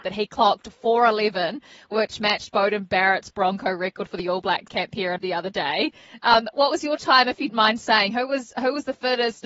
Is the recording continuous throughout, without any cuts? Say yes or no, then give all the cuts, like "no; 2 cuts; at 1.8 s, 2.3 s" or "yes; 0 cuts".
no; 4 cuts; at 4.7 s, 5.2 s, 6.5 s, 7.5 s